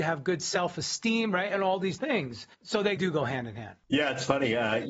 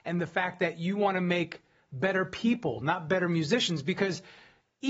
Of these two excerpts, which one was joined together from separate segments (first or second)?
first